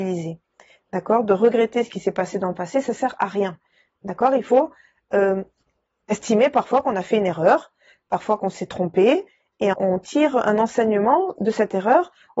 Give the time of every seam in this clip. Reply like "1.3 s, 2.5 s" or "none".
9.7 s

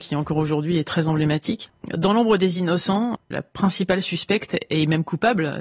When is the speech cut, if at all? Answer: none

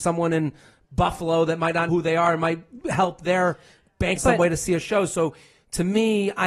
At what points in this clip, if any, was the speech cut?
1.9 s, 4.2 s

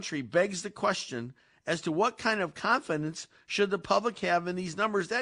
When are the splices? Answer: none

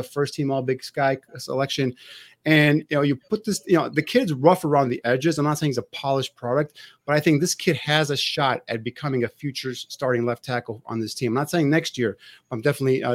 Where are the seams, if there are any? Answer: none

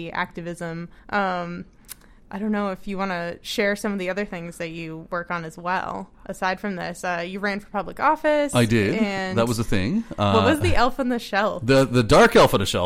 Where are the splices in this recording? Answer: 1.0 s, 6.1 s

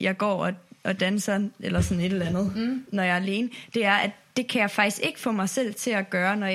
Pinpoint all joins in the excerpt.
none

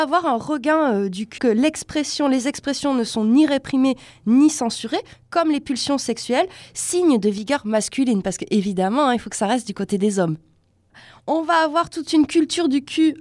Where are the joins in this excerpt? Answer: 1.4 s

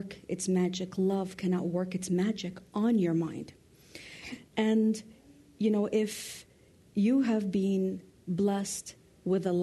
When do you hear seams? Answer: none

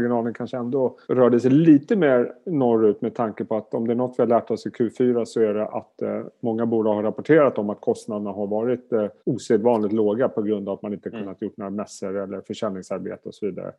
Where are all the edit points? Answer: 1.0 s, 9.2 s

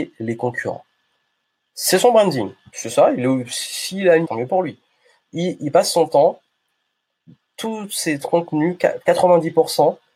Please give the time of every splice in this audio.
4.2 s

